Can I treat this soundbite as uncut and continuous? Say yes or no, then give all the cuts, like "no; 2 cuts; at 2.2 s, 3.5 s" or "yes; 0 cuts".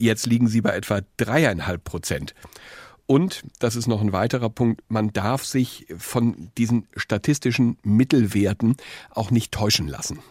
yes; 0 cuts